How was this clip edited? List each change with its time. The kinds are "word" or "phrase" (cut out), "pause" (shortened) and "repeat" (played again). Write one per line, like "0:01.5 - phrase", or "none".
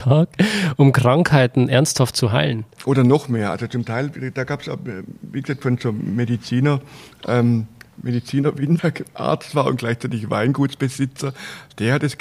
0:08.8 - word